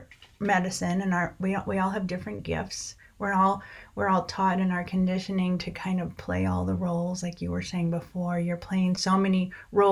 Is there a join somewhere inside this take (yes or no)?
no